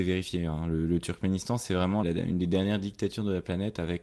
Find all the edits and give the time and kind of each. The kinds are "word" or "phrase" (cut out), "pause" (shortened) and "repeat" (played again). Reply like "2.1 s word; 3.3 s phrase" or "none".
2.0 s word